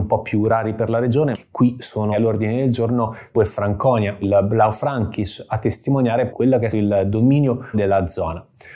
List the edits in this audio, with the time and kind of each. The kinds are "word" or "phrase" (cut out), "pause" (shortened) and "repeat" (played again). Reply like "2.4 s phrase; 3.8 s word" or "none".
1.3 s word; 2.1 s word; 3.3 s word; 4.2 s word; 6.3 s word; 6.7 s word; 7.7 s word